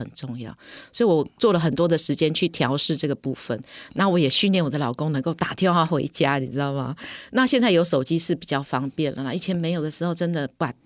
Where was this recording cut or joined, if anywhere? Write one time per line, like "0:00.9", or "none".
0:01.3